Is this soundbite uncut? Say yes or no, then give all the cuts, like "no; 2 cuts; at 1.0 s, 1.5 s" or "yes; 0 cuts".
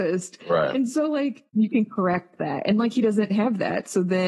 no; 1 cut; at 1.5 s